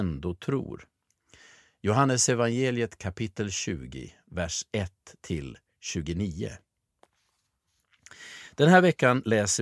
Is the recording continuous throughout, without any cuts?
yes; 0 cuts

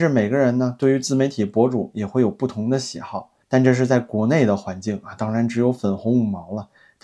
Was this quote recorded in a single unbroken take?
no; 1 cut; at 3.4 s

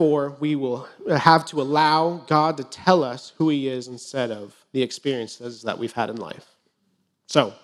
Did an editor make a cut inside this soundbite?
no; 0 cuts

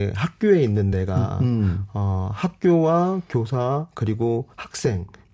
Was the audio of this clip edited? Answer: no; 0 cuts

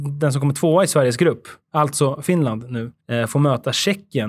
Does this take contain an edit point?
yes; 2 cuts; at 1.6 s, 3.0 s

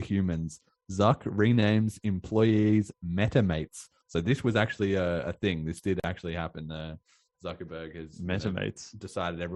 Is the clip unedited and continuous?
yes; 0 cuts

